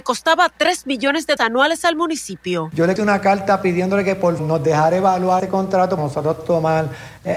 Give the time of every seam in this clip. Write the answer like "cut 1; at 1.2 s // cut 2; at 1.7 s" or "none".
cut 1; at 1.4 s // cut 2; at 3.0 s // cut 3; at 4.4 s // cut 4; at 5.4 s // cut 5; at 6.0 s